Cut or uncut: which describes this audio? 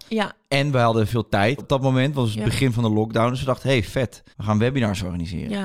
cut